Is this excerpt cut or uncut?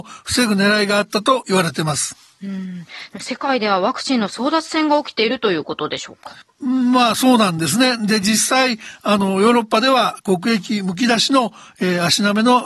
cut